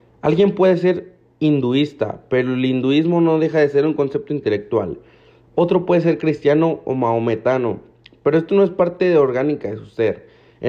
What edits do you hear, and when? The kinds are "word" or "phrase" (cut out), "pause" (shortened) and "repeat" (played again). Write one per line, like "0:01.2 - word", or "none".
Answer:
none